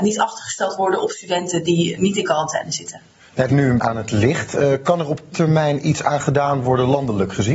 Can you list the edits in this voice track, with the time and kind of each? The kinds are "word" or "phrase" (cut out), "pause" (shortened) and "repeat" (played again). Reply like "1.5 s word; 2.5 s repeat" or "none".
2.0 s word; 3.5 s phrase; 3.8 s word; 5.3 s word